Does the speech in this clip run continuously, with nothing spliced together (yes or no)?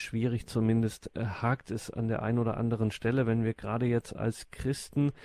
yes